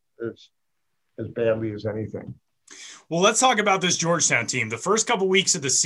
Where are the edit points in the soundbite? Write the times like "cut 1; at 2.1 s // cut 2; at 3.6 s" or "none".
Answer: none